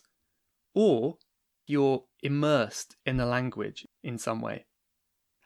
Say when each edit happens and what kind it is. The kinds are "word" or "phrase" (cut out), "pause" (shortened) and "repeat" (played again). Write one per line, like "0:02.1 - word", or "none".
0:01.7 - word
0:03.0 - pause